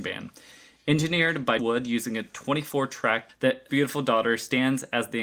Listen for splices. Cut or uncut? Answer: cut